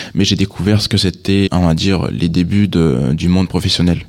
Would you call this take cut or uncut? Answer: cut